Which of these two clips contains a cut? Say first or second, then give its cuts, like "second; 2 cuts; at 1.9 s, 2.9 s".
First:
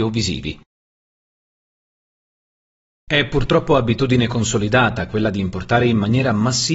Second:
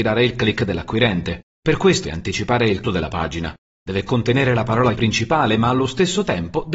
second; 4 cuts; at 1.5 s, 2.0 s, 2.8 s, 4.9 s